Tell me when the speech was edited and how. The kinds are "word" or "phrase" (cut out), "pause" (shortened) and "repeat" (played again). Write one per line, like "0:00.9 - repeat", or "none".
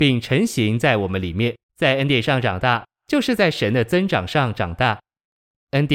0:01.6 - pause